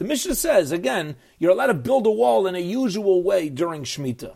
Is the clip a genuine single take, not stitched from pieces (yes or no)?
yes